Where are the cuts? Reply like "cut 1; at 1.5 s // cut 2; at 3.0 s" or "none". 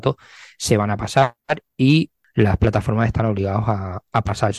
none